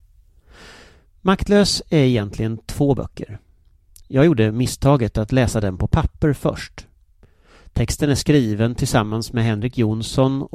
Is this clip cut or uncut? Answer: uncut